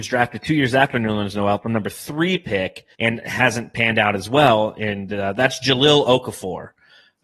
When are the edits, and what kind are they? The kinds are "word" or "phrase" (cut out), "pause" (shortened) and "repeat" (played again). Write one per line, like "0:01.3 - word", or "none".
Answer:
0:02.9 - pause